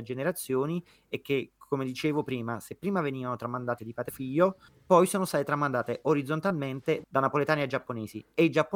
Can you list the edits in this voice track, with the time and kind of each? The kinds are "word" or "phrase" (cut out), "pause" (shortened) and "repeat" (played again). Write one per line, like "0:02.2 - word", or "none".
0:03.8 - word
0:04.1 - word